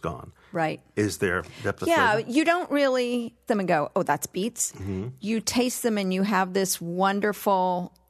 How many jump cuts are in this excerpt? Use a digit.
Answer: 1